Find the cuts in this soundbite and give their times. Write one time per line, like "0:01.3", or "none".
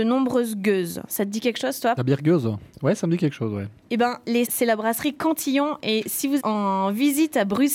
0:02.0
0:04.5
0:06.4